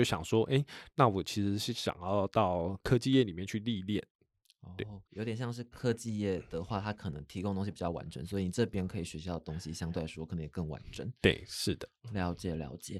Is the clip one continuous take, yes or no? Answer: no